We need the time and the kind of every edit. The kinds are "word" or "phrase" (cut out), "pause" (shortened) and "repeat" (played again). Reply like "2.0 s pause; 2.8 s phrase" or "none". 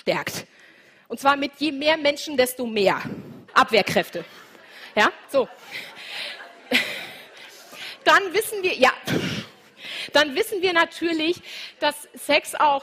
3.5 s pause; 5.2 s pause